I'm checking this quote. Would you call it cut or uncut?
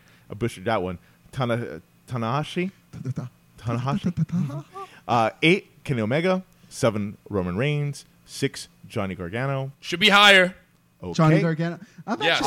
uncut